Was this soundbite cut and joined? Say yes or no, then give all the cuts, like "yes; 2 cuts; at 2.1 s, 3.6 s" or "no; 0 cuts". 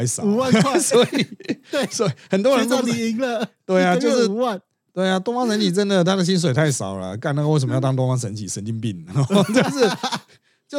no; 0 cuts